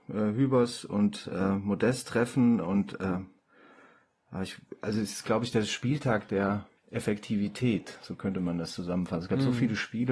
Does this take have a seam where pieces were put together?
yes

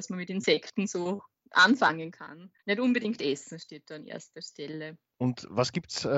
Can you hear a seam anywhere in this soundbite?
yes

